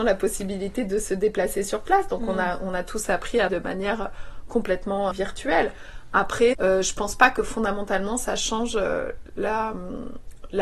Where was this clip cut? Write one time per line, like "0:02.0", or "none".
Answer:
0:03.5
0:05.1
0:06.5